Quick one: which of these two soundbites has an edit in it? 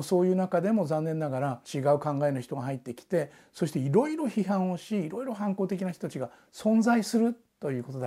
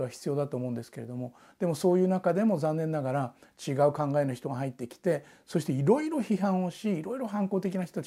first; 1 cut; at 1.6 s

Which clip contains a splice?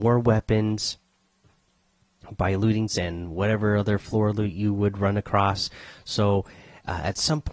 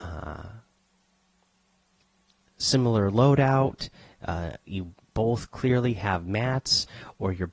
first; 1 cut; at 2.9 s

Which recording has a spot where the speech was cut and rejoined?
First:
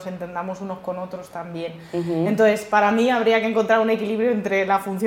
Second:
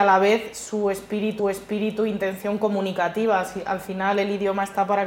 second; 1 cut; at 1.4 s

